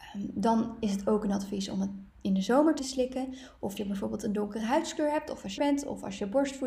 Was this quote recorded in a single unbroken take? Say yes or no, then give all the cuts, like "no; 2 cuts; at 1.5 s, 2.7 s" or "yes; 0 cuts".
no; 3 cuts; at 2.8 s, 3.8 s, 5.6 s